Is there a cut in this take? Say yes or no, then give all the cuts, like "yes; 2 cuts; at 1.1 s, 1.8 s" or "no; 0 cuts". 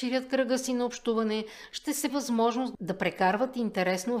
yes; 1 cut; at 2.1 s